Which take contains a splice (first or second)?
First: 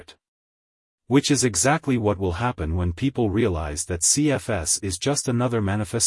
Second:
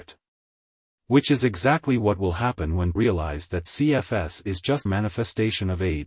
second